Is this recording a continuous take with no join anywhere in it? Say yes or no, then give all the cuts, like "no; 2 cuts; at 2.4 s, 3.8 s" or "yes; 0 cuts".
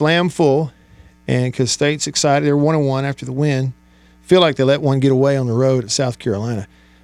yes; 0 cuts